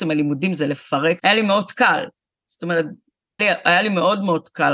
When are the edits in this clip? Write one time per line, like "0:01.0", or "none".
0:01.2
0:03.4